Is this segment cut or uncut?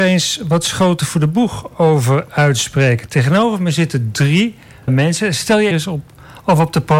cut